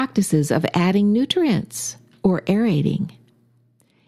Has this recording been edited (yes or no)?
no